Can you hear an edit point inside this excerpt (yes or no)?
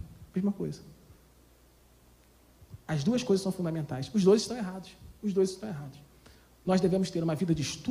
no